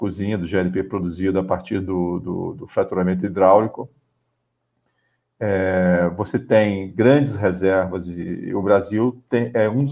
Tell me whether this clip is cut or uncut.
uncut